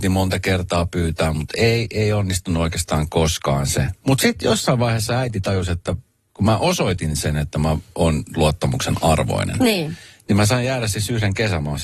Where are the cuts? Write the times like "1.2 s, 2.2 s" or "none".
none